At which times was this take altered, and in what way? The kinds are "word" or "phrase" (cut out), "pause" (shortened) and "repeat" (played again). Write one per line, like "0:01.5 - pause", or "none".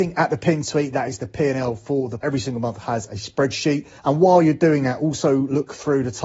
0:02.2 - phrase
0:04.0 - pause